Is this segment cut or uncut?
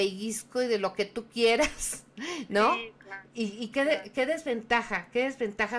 uncut